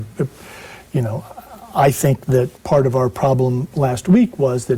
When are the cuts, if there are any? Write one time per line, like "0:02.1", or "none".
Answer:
0:02.6
0:03.7